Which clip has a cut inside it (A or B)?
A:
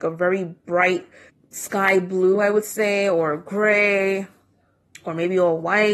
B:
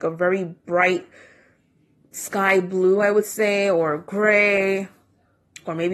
A